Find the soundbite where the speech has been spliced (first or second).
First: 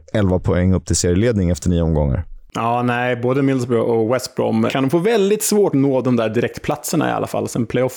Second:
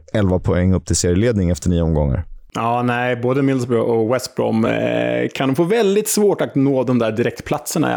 first